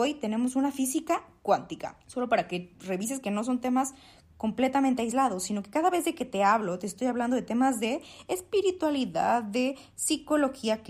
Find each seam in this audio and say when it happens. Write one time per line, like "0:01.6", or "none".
0:02.0

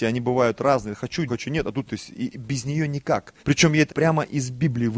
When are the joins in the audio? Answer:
0:01.3
0:01.9
0:03.4
0:03.9

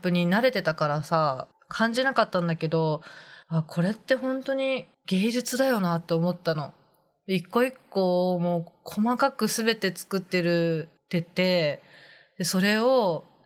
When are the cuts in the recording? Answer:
0:03.4

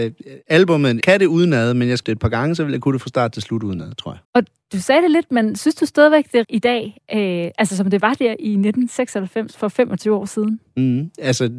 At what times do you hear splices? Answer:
0:01.0
0:02.0
0:04.2
0:06.4

